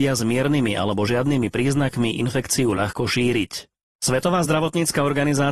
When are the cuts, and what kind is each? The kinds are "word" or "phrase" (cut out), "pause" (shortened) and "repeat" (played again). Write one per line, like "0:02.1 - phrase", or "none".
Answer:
none